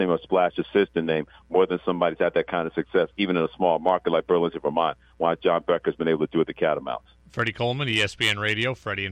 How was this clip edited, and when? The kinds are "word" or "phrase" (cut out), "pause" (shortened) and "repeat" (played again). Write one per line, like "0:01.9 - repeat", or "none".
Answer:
none